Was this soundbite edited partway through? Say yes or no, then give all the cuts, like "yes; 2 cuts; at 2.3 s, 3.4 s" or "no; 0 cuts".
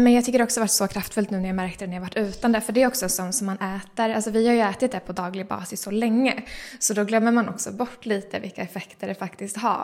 no; 0 cuts